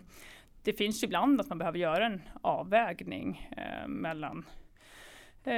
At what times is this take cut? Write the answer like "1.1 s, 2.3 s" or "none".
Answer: none